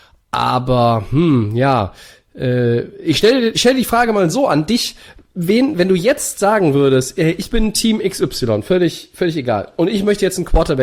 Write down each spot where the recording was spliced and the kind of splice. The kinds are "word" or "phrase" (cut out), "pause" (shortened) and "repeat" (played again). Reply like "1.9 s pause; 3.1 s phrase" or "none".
none